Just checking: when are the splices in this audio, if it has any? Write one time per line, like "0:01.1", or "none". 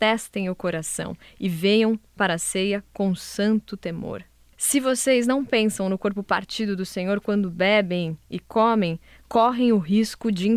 none

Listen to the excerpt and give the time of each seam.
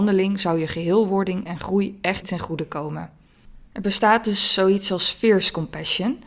0:02.2
0:03.7

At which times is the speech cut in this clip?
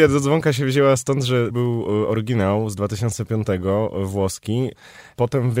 0:01.5

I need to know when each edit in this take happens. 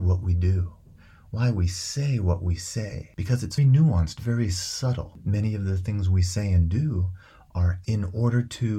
0:03.6
0:07.8

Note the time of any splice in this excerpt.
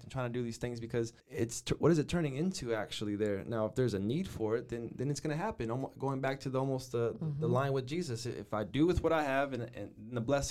0:01.2

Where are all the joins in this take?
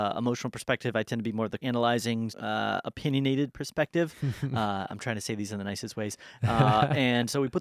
0:01.6
0:02.3

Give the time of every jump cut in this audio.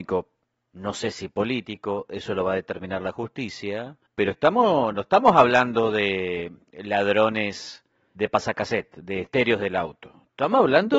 0:04.1
0:08.2

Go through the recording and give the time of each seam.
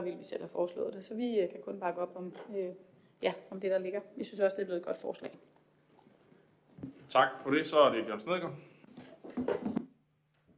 none

